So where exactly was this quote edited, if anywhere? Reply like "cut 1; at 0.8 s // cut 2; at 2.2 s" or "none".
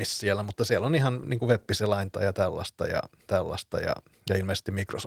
cut 1; at 3.3 s